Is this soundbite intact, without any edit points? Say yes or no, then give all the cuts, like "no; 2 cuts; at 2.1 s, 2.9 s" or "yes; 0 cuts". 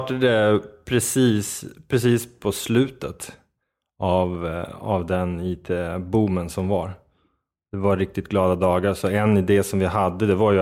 yes; 0 cuts